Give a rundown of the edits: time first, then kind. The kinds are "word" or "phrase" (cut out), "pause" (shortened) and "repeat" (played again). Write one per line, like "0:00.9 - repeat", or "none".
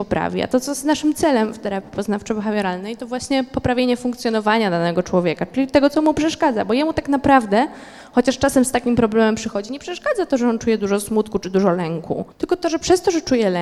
0:12.3 - pause